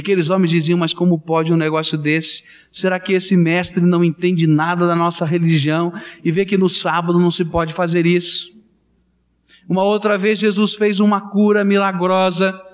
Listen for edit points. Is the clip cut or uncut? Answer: uncut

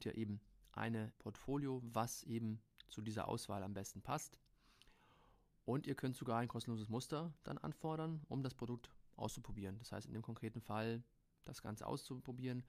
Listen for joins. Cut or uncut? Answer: cut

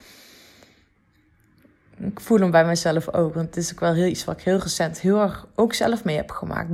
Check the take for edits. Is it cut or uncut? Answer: uncut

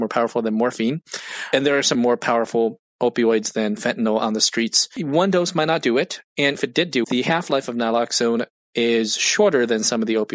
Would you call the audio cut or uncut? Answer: cut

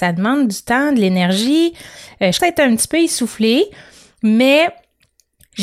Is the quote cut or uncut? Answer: cut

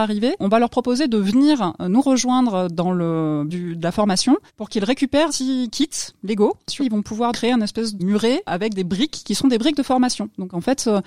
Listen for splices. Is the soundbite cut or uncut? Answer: cut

